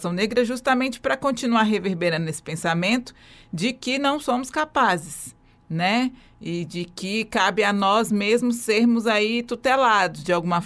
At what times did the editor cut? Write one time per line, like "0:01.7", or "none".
none